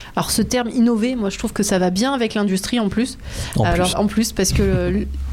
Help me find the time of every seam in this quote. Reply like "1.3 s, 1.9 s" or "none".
3.9 s